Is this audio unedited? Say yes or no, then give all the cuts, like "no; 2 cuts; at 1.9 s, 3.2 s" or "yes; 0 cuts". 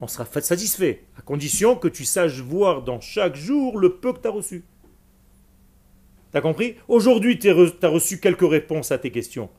yes; 0 cuts